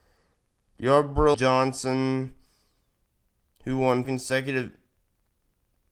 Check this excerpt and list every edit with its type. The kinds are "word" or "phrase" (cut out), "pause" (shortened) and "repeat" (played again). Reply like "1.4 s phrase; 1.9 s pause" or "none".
1.3 s word; 4.0 s word